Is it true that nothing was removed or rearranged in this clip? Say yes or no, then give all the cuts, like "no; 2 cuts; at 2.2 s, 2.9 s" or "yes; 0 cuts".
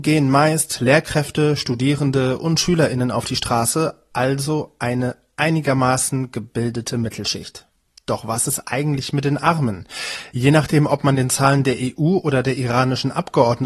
yes; 0 cuts